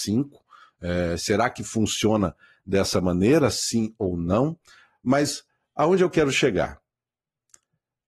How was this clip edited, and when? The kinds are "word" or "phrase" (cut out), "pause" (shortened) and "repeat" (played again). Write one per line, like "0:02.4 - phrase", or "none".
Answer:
none